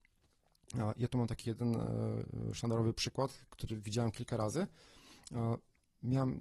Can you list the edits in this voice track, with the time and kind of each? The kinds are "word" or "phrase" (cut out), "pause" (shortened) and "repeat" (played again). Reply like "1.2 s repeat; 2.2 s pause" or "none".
none